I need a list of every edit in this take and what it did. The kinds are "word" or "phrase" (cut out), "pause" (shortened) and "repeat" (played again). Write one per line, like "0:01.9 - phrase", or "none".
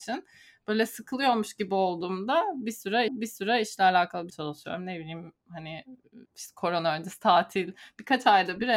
0:03.1 - repeat
0:04.3 - phrase
0:06.2 - pause